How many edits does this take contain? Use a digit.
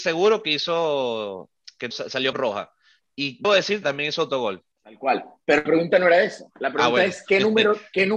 7